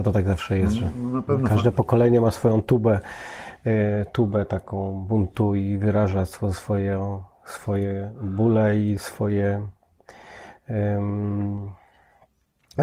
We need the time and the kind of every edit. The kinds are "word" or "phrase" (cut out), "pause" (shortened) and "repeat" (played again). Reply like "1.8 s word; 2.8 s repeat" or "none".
none